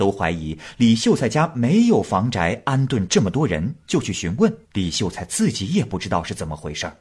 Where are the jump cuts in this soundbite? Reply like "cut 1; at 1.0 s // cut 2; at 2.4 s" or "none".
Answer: cut 1; at 4.6 s